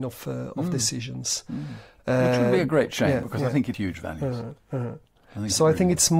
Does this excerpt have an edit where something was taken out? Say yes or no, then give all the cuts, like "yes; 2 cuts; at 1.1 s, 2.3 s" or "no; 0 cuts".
yes; 1 cut; at 3.7 s